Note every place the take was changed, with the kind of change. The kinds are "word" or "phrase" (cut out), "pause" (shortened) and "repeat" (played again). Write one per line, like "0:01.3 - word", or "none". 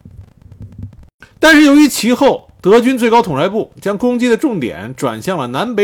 0:01.3 - pause